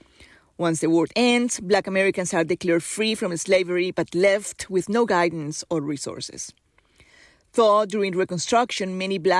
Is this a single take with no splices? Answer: yes; 0 cuts

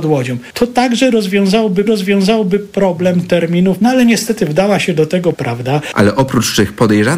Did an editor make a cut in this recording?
yes; 3 cuts; at 1.9 s, 3.8 s, 5.3 s

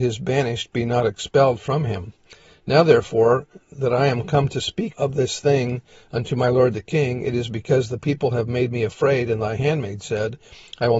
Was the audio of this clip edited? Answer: yes; 1 cut; at 4.9 s

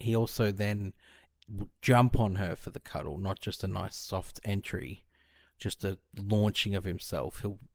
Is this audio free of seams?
yes; 0 cuts

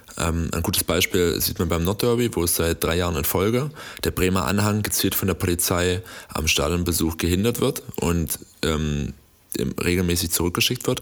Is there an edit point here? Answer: no; 0 cuts

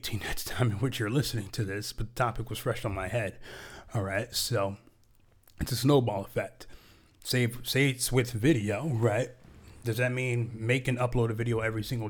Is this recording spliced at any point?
no; 0 cuts

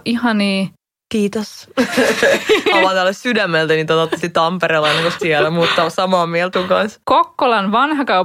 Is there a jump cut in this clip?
yes; 5 cuts; at 2.7 s, 4.2 s, 5.2 s, 6.5 s, 7.0 s

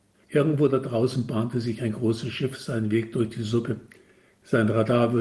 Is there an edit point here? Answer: no; 0 cuts

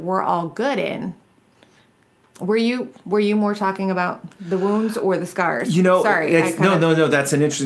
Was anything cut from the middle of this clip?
no; 0 cuts

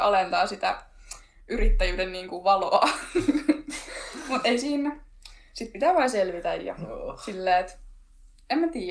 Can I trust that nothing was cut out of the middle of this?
yes; 0 cuts

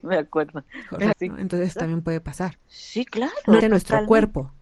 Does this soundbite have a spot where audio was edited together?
yes; 3 cuts; at 1.1 s, 1.8 s, 3.6 s

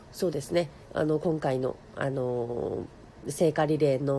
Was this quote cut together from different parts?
no; 0 cuts

